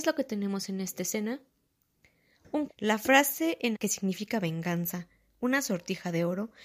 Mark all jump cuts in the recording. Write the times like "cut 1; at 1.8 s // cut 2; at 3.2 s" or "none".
cut 1; at 2.7 s // cut 2; at 3.7 s